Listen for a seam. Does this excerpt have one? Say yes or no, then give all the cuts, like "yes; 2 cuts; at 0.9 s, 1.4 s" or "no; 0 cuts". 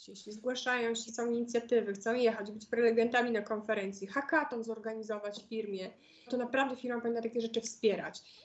yes; 2 cuts; at 1.1 s, 6.3 s